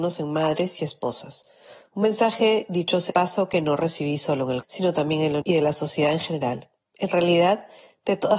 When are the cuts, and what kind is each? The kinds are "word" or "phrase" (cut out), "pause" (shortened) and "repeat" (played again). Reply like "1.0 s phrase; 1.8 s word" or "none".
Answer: 3.1 s word; 4.6 s word; 5.4 s word